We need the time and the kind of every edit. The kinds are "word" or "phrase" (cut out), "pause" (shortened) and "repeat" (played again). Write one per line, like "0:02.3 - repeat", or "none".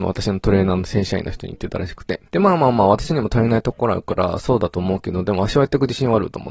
0:02.3 - pause